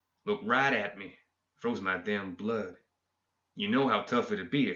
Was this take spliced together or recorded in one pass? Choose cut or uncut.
uncut